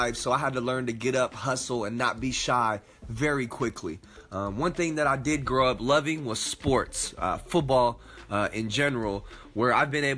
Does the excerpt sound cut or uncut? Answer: uncut